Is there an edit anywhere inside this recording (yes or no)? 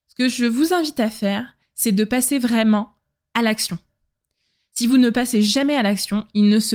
no